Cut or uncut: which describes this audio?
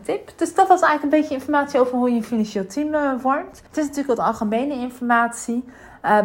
cut